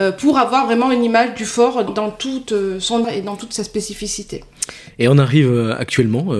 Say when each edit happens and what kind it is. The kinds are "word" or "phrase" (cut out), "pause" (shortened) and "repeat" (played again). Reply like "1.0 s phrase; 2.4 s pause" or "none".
1.9 s word; 3.0 s word